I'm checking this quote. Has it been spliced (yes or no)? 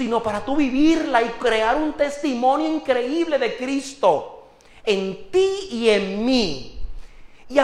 no